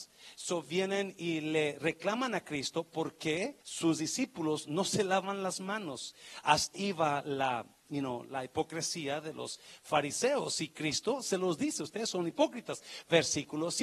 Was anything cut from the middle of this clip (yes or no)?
yes